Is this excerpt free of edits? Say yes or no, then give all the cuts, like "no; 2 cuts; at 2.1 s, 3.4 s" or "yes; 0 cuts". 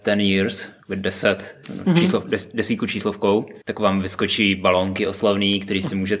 no; 2 cuts; at 1.6 s, 3.6 s